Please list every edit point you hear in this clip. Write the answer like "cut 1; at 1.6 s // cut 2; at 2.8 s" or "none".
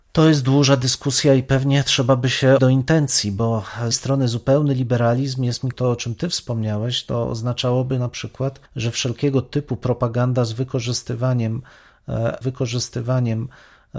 cut 1; at 2.6 s // cut 2; at 3.9 s // cut 3; at 5.7 s // cut 4; at 8.7 s // cut 5; at 12.4 s